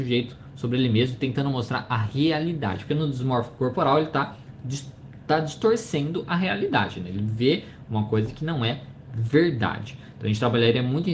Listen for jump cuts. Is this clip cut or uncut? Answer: uncut